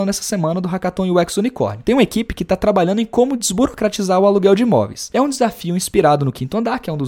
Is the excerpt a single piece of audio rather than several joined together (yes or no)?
yes